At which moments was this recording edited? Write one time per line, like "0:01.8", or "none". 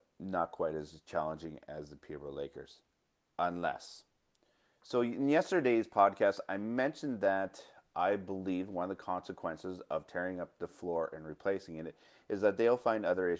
none